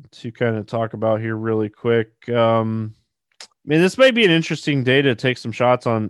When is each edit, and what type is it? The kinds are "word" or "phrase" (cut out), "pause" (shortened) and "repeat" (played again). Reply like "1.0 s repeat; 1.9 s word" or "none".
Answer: 3.5 s pause